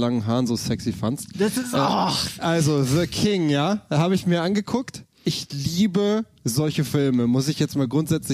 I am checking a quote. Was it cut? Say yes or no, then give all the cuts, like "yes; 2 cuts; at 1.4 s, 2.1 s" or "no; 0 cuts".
no; 0 cuts